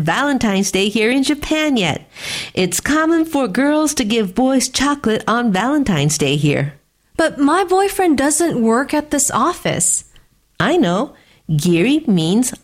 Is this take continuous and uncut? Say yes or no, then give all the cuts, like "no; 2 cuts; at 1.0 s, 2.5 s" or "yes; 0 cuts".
yes; 0 cuts